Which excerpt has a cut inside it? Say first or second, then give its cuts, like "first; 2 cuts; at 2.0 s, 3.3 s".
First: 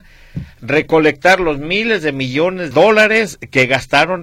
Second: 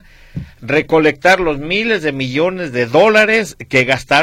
first; 1 cut; at 2.7 s